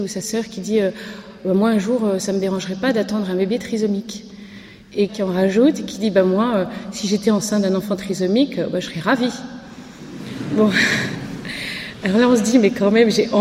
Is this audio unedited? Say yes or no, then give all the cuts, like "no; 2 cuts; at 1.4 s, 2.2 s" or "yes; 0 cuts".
no; 1 cut; at 5.1 s